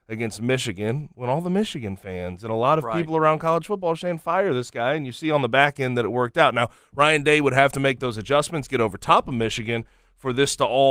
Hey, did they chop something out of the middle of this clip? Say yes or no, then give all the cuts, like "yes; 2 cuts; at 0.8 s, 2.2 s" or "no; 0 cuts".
no; 0 cuts